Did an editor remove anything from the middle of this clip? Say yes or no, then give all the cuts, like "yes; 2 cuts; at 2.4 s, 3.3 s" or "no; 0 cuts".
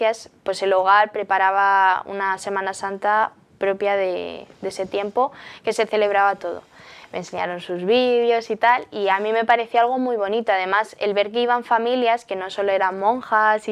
no; 0 cuts